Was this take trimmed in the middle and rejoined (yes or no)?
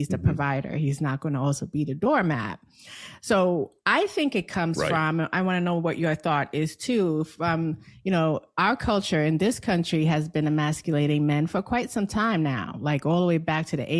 no